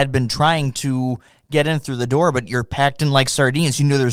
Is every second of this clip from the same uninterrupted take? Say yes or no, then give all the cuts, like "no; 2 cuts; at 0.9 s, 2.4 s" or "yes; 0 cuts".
yes; 0 cuts